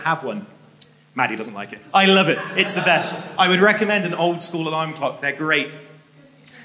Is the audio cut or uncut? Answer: uncut